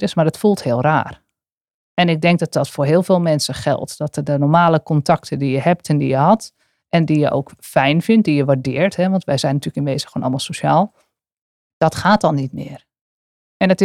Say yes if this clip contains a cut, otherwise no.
no